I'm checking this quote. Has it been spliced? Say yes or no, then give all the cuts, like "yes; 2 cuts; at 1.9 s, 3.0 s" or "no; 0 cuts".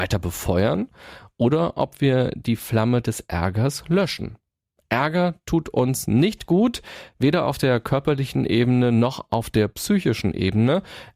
no; 0 cuts